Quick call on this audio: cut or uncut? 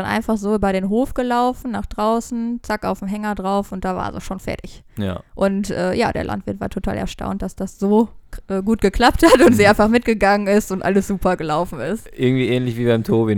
uncut